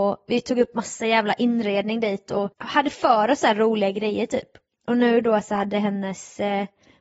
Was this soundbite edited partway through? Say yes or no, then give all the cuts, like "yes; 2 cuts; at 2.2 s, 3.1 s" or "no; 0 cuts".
no; 0 cuts